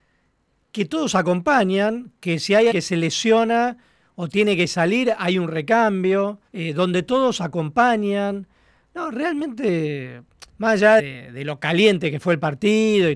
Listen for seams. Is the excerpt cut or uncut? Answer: cut